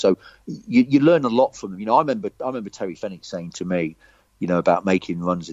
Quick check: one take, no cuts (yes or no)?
yes